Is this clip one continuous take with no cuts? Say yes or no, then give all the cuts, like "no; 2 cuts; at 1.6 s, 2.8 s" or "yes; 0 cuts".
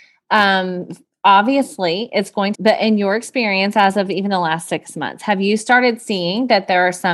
no; 1 cut; at 2.5 s